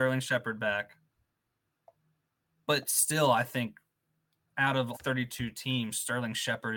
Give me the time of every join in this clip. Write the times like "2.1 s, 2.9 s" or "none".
4.9 s